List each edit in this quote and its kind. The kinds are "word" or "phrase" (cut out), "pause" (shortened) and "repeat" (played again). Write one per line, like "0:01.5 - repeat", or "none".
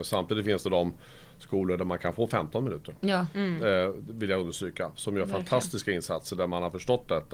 none